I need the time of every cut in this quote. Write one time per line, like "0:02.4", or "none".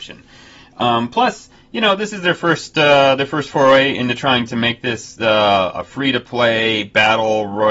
none